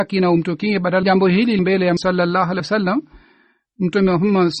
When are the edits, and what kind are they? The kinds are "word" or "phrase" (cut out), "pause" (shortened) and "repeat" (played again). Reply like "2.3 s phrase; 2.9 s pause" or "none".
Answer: 1.0 s phrase; 1.6 s word; 2.0 s word; 2.6 s word; 3.7 s word